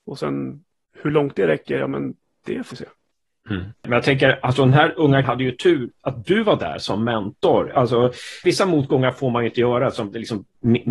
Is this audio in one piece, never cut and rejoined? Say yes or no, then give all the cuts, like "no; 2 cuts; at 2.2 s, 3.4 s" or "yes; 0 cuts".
no; 2 cuts; at 2.7 s, 5.2 s